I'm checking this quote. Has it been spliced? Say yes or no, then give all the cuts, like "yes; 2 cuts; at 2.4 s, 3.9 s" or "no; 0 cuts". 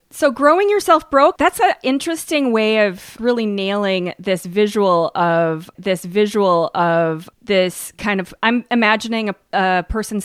yes; 1 cut; at 5.7 s